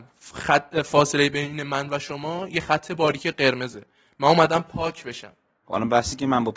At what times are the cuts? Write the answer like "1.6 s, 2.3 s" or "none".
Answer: none